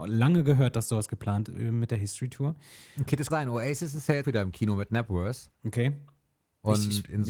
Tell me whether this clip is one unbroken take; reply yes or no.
no